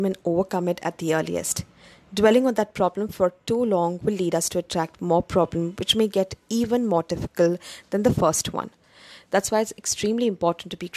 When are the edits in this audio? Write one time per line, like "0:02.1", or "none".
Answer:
none